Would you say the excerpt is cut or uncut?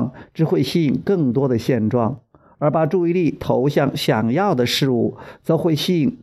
uncut